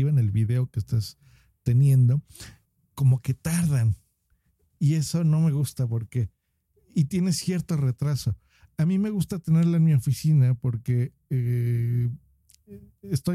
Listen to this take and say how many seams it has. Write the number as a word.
one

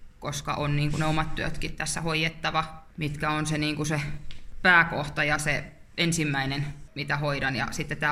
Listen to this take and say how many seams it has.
zero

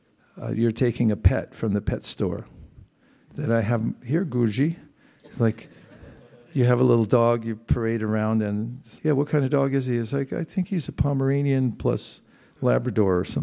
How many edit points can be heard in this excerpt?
one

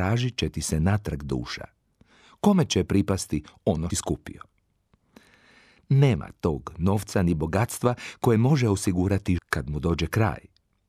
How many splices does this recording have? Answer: two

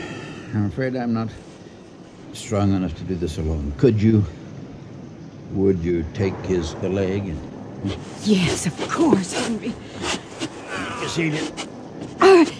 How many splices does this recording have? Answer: three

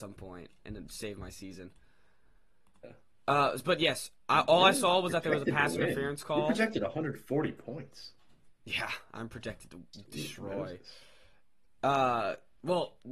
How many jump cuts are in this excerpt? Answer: zero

